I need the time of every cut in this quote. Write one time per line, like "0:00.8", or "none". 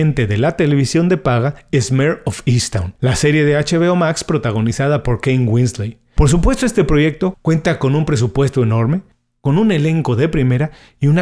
none